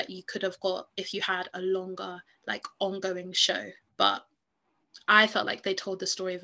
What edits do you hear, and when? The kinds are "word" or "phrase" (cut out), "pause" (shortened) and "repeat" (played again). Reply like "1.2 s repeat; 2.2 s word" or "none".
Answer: 3.8 s pause